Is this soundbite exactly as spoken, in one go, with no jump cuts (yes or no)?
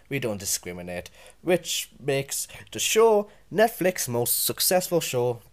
yes